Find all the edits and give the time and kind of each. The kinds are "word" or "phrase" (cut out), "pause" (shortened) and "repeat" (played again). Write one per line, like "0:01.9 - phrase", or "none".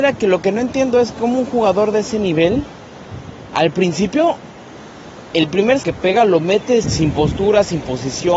0:05.8 - word
0:06.8 - word